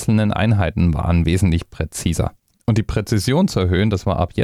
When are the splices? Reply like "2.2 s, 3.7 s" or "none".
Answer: none